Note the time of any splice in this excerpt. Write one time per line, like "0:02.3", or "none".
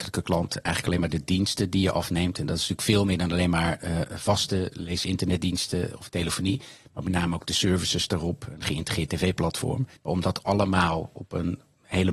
0:10.0